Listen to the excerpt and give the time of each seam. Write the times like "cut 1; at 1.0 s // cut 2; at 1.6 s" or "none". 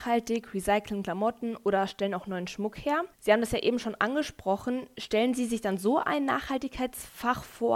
cut 1; at 3.1 s